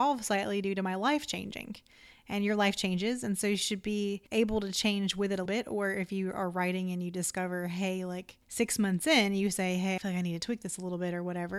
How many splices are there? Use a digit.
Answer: 4